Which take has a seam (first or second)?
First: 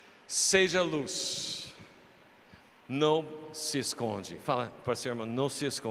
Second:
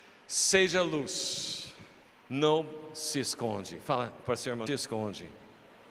second